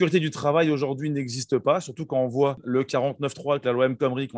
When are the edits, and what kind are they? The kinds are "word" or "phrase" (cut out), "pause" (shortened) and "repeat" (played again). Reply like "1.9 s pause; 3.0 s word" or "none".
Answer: none